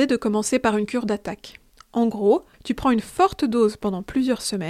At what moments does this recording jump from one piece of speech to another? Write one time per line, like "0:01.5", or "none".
0:01.7
0:02.5

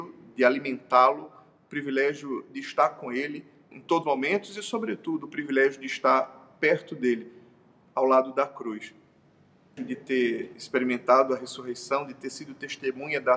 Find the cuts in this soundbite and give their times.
0:03.7
0:04.0
0:09.8
0:10.5

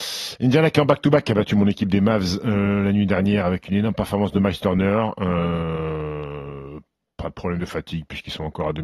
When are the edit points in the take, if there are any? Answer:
none

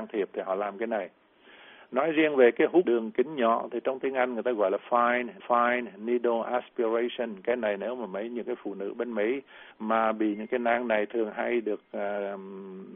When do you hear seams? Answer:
0:02.8
0:05.4
0:09.7

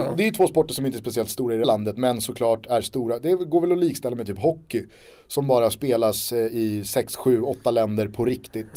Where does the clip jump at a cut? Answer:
0:01.6

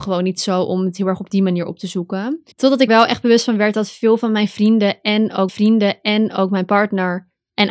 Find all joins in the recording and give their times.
0:02.5
0:02.9
0:05.5

